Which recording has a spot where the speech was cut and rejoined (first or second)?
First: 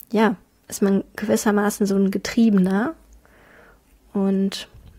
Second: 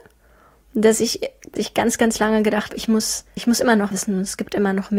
second